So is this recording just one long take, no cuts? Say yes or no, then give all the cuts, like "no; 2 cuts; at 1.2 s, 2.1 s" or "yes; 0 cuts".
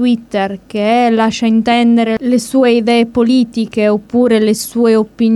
yes; 0 cuts